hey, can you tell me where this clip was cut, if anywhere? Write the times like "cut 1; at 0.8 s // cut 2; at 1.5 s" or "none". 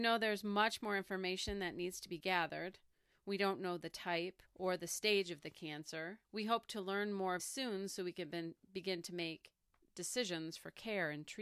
cut 1; at 4.5 s // cut 2; at 6.2 s // cut 3; at 7.4 s

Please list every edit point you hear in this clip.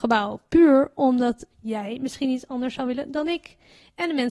none

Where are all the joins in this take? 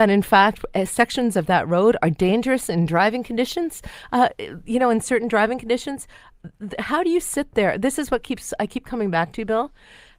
none

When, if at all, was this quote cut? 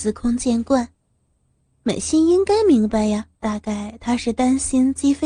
cut 1; at 3.3 s

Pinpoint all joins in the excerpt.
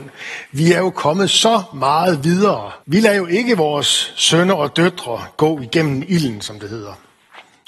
cut 1; at 2.8 s

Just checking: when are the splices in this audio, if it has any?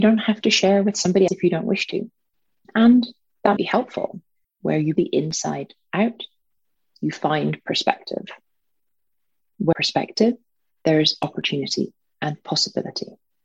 cut 1; at 1.3 s // cut 2; at 2.3 s // cut 3; at 3.6 s // cut 4; at 4.4 s // cut 5; at 5.0 s // cut 6; at 6.6 s // cut 7; at 9.7 s

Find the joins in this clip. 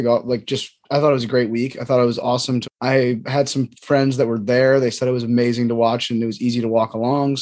cut 1; at 2.6 s

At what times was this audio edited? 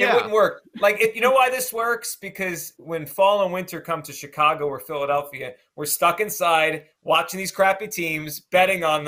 cut 1; at 2.8 s

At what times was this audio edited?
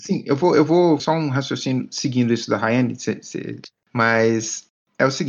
cut 1; at 1.0 s

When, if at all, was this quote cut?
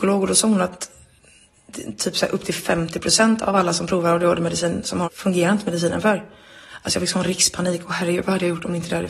cut 1; at 5.0 s

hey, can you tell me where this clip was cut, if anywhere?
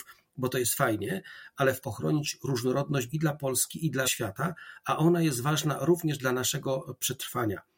cut 1; at 1.8 s // cut 2; at 3.1 s // cut 3; at 4.0 s

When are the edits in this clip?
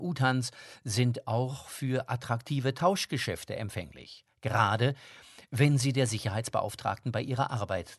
none

